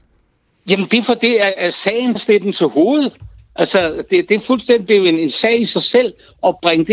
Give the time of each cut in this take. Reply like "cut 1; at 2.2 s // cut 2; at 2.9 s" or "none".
cut 1; at 2.2 s